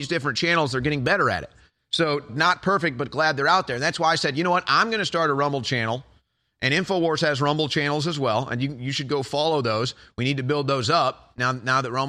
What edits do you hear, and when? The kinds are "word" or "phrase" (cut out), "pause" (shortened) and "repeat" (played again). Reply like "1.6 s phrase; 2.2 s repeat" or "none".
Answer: 2.3 s word